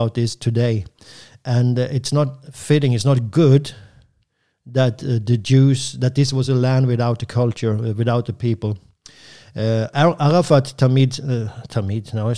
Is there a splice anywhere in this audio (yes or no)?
no